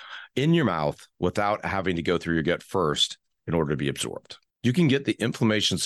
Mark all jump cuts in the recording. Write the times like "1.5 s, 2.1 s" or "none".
none